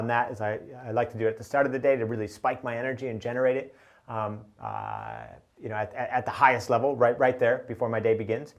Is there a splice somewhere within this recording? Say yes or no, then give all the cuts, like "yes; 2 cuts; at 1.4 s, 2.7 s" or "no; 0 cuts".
no; 0 cuts